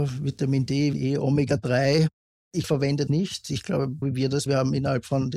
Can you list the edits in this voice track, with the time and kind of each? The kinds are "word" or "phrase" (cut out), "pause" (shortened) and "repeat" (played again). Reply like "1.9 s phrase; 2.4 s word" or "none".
0.9 s word; 2.6 s word; 3.1 s word; 4.0 s word; 4.5 s word